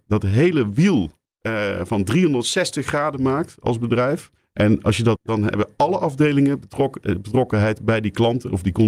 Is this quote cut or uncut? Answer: cut